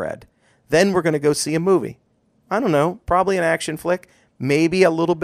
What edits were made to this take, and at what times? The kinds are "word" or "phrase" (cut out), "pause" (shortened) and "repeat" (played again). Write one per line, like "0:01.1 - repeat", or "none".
none

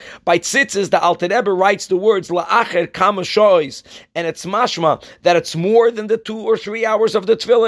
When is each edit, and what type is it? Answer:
none

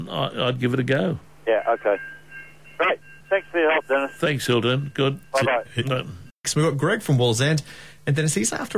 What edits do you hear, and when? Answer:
0:01.2 - pause
0:03.2 - pause
0:05.2 - pause

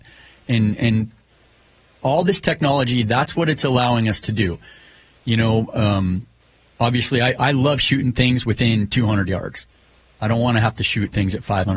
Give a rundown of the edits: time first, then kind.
none

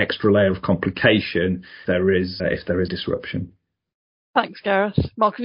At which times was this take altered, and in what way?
0:01.8 - word
0:02.4 - word
0:02.9 - word

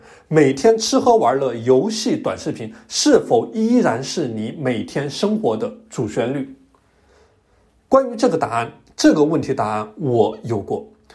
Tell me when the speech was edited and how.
none

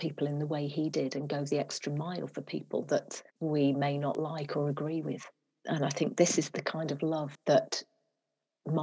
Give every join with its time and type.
0:03.3 - pause

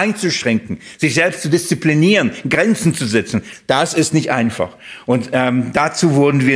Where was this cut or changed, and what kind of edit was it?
none

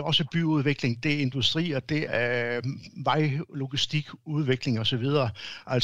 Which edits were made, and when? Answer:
0:02.1 - word

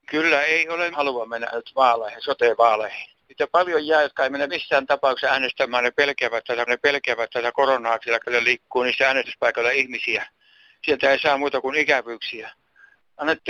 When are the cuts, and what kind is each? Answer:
0:00.9 - word
0:01.5 - word
0:03.2 - pause
0:04.5 - word
0:06.7 - repeat
0:08.2 - word

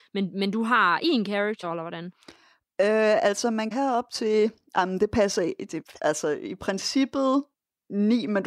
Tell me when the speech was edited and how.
0:01.6 - word
0:03.7 - word
0:06.0 - word
0:07.5 - pause

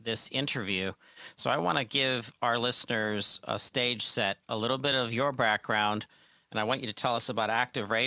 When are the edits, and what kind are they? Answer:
none

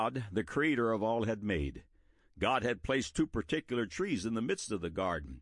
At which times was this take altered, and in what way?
none

